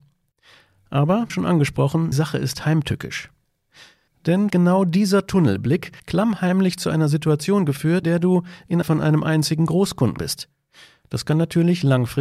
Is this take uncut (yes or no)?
no